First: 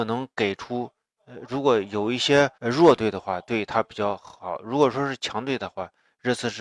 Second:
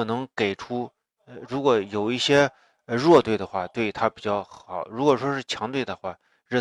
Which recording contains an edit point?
first; 1 cut; at 2.6 s

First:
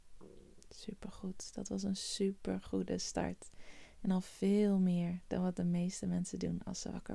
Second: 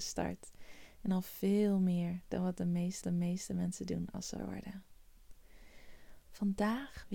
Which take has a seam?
second; 2 cuts; at 3.0 s, 4.4 s

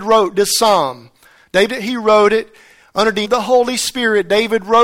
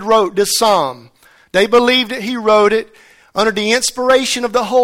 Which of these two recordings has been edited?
first; 2 cuts; at 1.7 s, 3.2 s

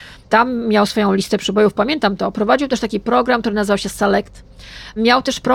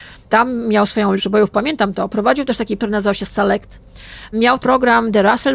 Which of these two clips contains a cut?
second; 3 cuts; at 1.2 s, 2.8 s, 4.6 s

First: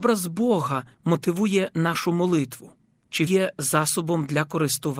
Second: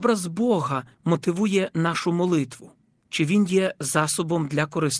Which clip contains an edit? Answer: first; 1 cut; at 3.3 s

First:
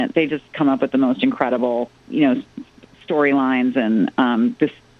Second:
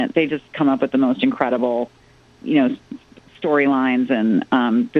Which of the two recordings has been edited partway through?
first; 1 cut; at 2.0 s

